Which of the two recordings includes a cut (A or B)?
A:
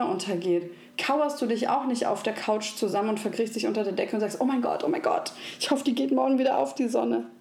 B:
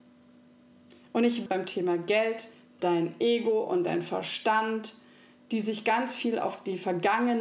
B